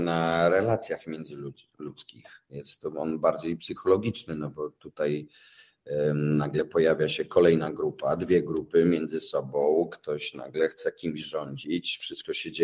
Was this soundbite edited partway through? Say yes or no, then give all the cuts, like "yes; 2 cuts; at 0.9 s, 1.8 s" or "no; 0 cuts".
no; 0 cuts